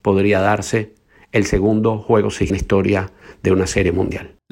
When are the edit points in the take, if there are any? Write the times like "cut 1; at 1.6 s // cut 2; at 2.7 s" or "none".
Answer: cut 1; at 2.5 s